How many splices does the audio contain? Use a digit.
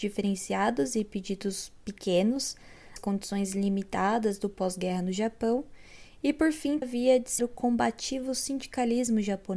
3